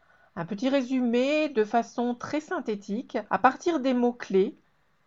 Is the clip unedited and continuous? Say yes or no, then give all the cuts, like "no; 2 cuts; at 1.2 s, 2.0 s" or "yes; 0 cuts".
no; 1 cut; at 3.3 s